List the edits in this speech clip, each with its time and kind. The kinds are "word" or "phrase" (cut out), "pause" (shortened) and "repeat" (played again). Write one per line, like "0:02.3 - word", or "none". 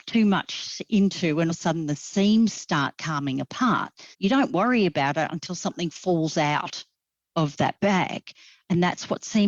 0:01.5 - phrase
0:04.1 - pause